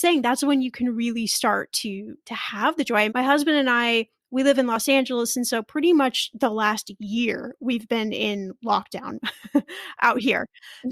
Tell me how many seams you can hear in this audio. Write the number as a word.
one